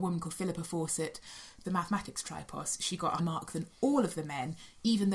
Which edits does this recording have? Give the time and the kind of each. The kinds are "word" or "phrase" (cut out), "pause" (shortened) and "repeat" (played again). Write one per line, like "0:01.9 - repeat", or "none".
0:01.6 - word
0:03.2 - word